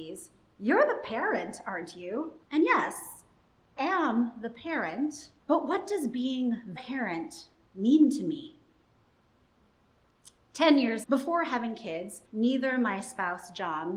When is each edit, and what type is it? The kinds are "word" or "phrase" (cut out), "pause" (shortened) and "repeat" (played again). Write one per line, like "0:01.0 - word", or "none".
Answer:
0:02.4 - pause
0:03.8 - word
0:05.4 - pause
0:06.8 - word
0:11.0 - word
0:12.2 - pause